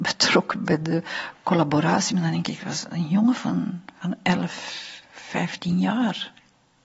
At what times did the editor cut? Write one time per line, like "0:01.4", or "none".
0:05.0